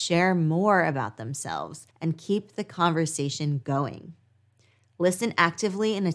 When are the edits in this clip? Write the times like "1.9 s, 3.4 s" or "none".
1.9 s